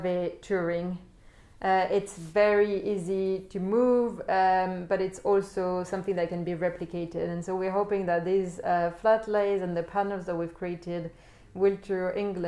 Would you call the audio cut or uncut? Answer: uncut